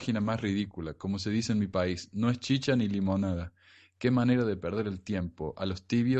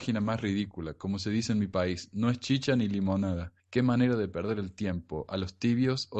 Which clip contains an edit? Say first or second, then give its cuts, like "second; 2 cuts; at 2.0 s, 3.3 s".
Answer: second; 1 cut; at 3.6 s